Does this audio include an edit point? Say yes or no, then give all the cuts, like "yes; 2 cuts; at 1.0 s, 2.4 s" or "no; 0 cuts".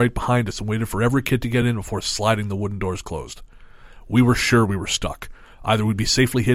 no; 0 cuts